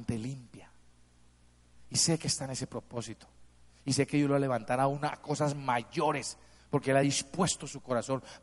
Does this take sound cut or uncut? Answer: uncut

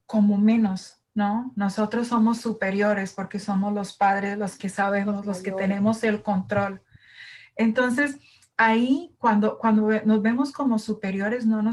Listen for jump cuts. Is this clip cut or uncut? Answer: cut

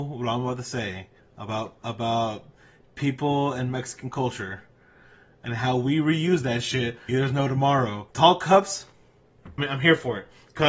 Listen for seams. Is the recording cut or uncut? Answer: cut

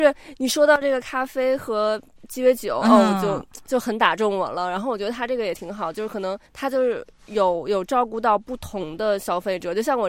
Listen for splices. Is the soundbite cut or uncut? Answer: cut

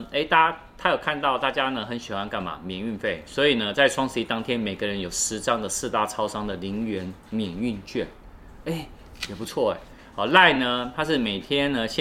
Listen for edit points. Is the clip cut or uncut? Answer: uncut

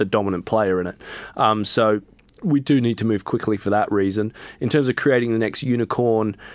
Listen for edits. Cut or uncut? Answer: uncut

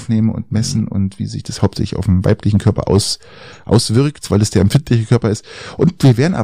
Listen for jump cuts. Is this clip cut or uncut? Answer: uncut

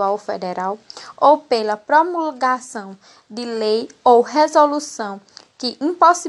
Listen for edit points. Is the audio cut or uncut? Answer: uncut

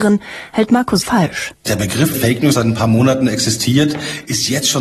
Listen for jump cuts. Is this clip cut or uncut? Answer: cut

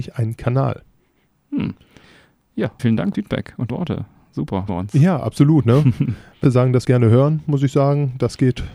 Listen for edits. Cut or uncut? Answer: cut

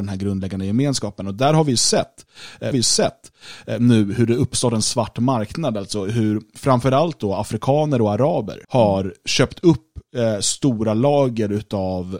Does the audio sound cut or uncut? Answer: cut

